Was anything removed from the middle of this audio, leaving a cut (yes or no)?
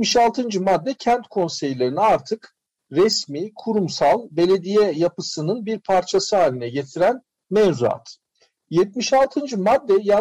no